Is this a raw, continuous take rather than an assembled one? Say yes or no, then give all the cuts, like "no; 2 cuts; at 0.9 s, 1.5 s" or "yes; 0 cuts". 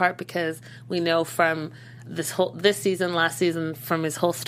no; 1 cut; at 2.0 s